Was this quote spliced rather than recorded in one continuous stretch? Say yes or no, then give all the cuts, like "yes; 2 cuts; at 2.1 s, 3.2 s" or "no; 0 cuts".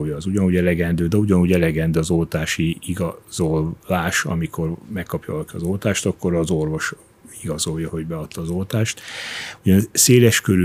yes; 1 cut; at 7.9 s